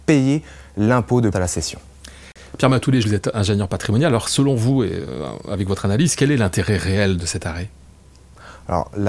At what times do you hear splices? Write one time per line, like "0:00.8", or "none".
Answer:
0:01.3
0:03.0
0:07.2